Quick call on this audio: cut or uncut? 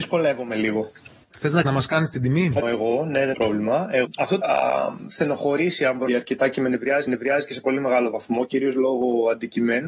cut